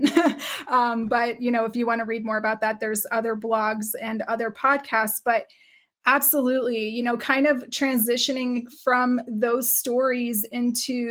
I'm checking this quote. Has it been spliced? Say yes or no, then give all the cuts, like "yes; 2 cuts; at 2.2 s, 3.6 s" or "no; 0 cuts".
no; 0 cuts